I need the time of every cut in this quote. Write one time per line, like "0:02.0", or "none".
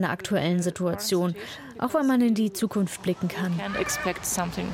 none